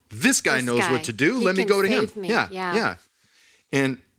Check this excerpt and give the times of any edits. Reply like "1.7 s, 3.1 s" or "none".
none

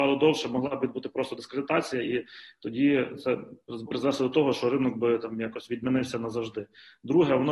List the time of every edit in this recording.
3.9 s

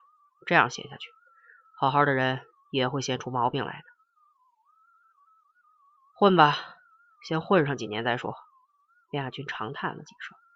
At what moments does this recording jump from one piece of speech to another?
none

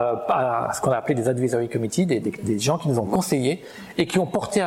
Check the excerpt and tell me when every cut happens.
2.2 s

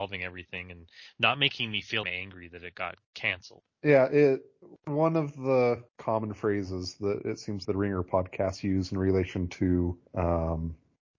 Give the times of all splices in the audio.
2.0 s, 3.0 s, 5.9 s, 7.6 s, 10.1 s

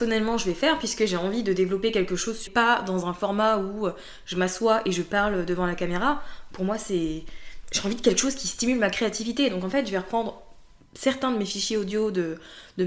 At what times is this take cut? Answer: 2.5 s

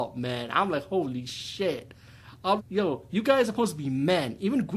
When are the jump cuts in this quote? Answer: 2.6 s

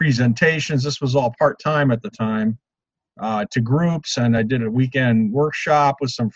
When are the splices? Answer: none

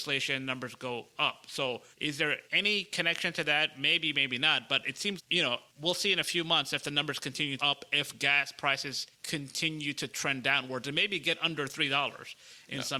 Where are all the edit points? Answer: 1.9 s, 2.5 s, 5.2 s, 5.7 s, 7.6 s, 9.1 s

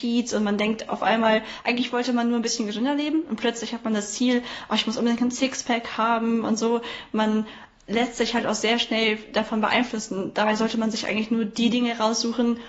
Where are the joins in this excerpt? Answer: none

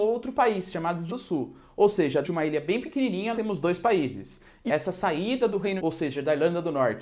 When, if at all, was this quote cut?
1.1 s, 2.2 s, 3.3 s, 4.7 s, 5.8 s

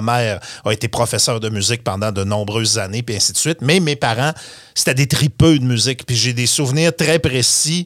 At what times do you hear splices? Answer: none

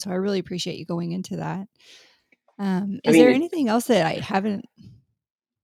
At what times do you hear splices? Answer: none

